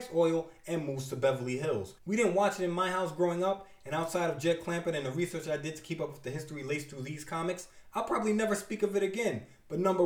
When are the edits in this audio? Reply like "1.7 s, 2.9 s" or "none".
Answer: 2.0 s